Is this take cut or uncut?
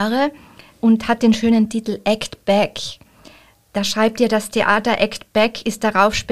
uncut